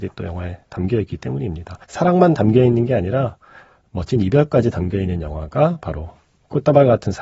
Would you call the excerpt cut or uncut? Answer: cut